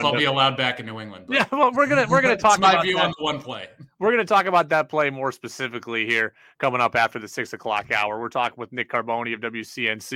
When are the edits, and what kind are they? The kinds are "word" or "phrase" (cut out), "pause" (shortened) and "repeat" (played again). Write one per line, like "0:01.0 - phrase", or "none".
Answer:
none